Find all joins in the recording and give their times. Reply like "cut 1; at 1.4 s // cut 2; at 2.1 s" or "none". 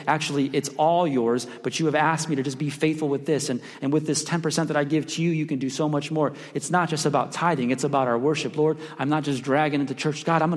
none

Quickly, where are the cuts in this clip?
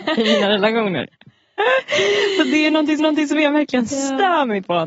cut 1; at 3.0 s

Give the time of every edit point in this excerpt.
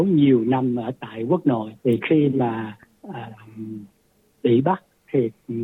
cut 1; at 1.8 s

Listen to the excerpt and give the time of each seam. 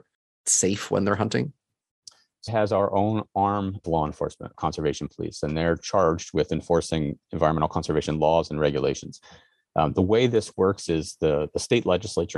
cut 1; at 2.5 s // cut 2; at 3.8 s // cut 3; at 4.5 s

